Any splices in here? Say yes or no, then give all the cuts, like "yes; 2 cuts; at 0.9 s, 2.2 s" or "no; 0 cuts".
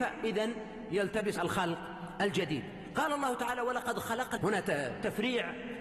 yes; 2 cuts; at 1.4 s, 4.4 s